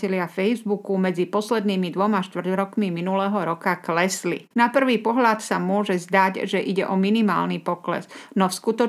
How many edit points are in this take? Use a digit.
1